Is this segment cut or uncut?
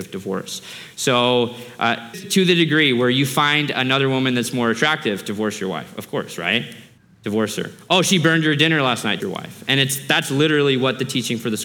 cut